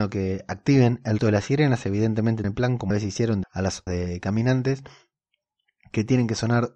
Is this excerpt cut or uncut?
cut